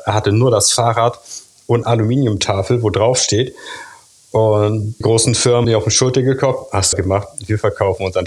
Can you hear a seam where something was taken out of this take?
yes; 4 cuts; at 1.8 s, 5.0 s, 5.6 s, 6.9 s

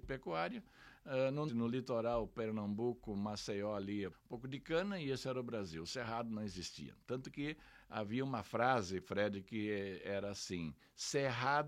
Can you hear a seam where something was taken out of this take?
yes; 2 cuts; at 1.5 s, 4.1 s

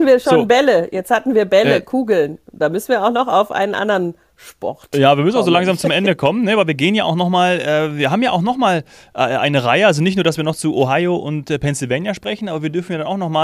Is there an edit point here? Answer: no; 0 cuts

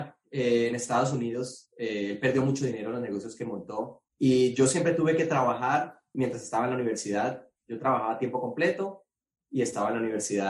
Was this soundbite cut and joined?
yes; 2 cuts; at 4.1 s, 6.1 s

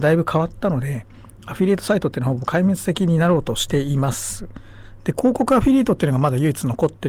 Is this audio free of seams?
yes; 0 cuts

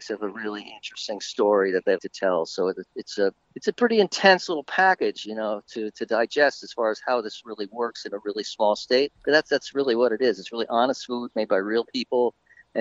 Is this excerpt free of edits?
no; 3 cuts; at 2.0 s, 3.4 s, 9.1 s

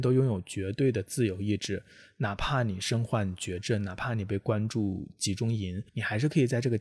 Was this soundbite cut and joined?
yes; 1 cut; at 5.9 s

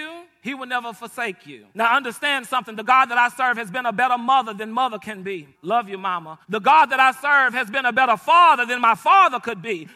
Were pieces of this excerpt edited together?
yes; 3 cuts; at 1.7 s, 5.5 s, 6.4 s

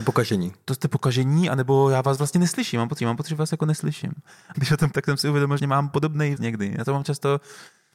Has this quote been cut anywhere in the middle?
yes; 5 cuts; at 3.0 s, 4.5 s, 4.9 s, 5.6 s, 6.4 s

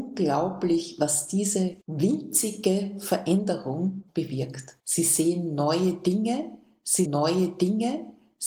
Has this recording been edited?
yes; 4 cuts; at 1.8 s, 4.1 s, 4.8 s, 7.0 s

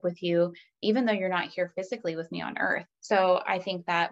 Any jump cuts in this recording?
yes; 1 cut; at 2.9 s

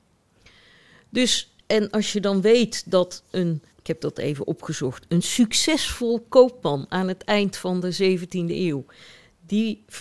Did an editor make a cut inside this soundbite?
yes; 1 cut; at 3.7 s

